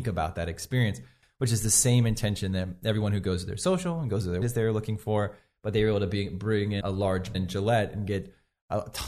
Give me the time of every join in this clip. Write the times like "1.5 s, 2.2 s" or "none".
4.4 s, 6.8 s, 7.3 s